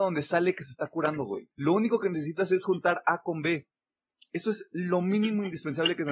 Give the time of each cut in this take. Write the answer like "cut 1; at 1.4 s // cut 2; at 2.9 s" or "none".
cut 1; at 1.5 s // cut 2; at 4.0 s